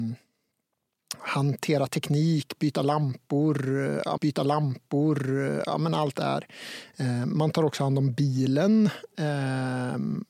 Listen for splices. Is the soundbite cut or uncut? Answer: cut